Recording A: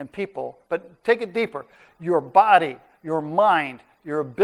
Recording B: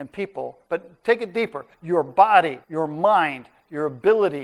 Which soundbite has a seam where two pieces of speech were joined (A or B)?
B